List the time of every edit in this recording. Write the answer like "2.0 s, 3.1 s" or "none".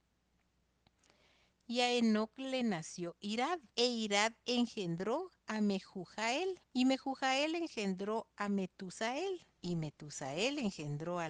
3.7 s, 5.4 s, 6.6 s, 9.5 s